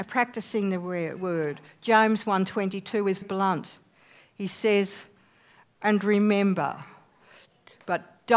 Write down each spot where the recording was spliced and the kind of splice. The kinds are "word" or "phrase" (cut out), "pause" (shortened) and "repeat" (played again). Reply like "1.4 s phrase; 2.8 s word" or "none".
3.2 s word